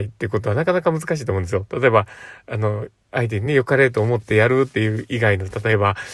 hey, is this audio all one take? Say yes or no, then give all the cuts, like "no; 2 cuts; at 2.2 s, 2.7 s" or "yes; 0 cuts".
yes; 0 cuts